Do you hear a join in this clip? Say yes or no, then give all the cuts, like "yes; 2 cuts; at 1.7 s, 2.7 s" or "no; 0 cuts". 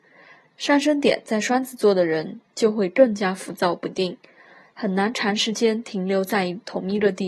no; 0 cuts